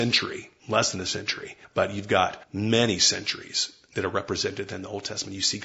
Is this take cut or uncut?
cut